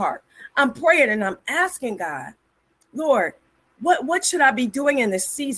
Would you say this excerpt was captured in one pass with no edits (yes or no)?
yes